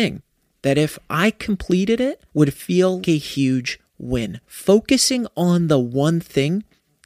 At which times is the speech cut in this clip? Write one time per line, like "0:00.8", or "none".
0:02.3
0:03.0
0:04.4